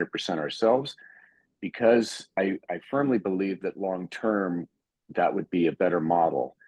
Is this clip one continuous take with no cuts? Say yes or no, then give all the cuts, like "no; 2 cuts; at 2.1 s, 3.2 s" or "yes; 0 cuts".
yes; 0 cuts